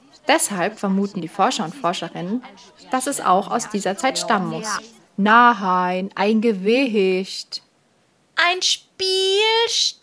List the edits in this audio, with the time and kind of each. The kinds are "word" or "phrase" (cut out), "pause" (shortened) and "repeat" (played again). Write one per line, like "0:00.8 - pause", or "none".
none